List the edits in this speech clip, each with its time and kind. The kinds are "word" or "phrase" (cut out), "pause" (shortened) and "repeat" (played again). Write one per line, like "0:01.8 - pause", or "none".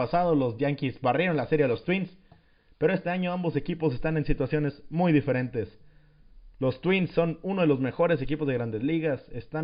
none